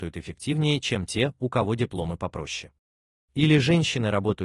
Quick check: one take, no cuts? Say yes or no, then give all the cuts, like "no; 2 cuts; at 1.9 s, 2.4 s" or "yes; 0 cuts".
yes; 0 cuts